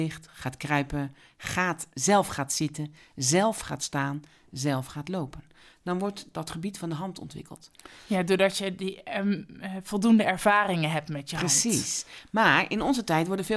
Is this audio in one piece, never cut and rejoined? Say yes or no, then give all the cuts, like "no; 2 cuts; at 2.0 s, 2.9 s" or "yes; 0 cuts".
yes; 0 cuts